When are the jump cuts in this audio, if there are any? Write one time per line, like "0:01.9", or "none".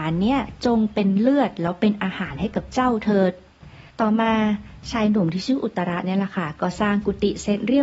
0:03.9